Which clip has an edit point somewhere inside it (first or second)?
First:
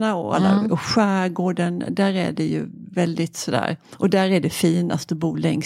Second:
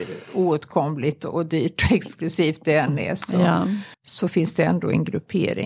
second